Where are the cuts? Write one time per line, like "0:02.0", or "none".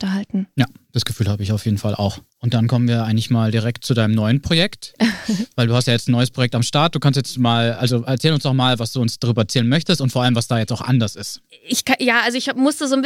0:02.3